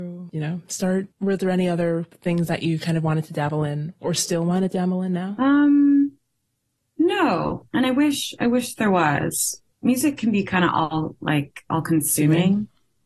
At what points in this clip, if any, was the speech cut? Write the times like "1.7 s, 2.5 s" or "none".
1.1 s, 9.7 s